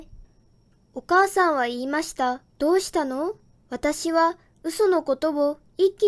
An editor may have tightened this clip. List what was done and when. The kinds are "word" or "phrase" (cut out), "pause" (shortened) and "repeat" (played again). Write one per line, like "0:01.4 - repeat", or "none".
0:02.5 - pause
0:03.5 - pause